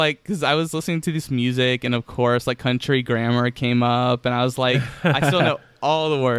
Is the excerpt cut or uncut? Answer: uncut